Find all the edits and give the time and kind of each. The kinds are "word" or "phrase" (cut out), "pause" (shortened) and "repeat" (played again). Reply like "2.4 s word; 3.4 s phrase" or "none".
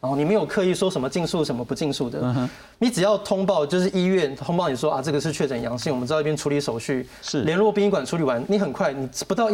none